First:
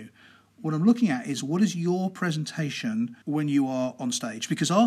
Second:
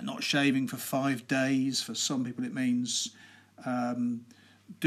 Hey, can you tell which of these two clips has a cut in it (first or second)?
first